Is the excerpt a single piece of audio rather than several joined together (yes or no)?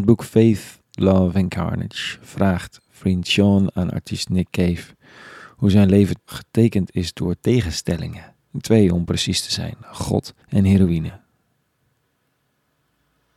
no